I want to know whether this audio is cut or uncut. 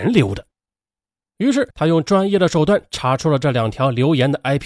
cut